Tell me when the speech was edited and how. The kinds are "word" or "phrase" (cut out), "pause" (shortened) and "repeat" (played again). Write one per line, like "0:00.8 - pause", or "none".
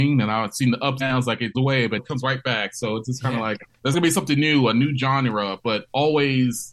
0:01.0 - word
0:01.5 - word
0:02.0 - word
0:03.9 - word